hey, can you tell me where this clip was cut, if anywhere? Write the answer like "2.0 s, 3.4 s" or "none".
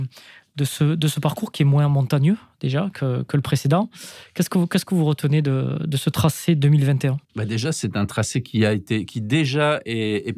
7.2 s